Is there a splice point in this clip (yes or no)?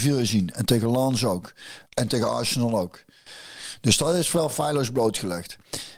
yes